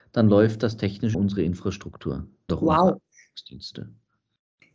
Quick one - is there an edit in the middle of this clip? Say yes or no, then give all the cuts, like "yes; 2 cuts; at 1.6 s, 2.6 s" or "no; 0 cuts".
yes; 2 cuts; at 1.1 s, 2.5 s